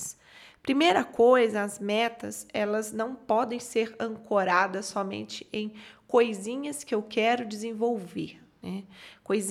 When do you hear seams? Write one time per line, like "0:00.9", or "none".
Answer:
none